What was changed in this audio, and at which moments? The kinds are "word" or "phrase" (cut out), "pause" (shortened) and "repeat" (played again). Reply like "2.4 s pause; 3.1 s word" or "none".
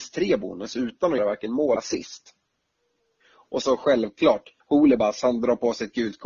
1.2 s word; 1.8 s word; 3.6 s word; 4.6 s pause